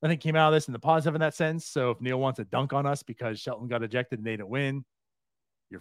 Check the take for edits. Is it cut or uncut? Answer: uncut